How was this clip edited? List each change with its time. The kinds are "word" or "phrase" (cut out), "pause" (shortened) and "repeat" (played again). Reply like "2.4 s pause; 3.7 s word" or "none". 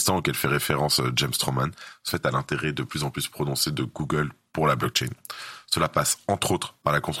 2.1 s phrase